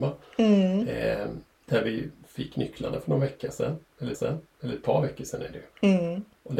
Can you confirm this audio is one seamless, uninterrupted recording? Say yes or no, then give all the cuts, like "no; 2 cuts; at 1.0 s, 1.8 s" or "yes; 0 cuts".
no; 2 cuts; at 4.1 s, 5.7 s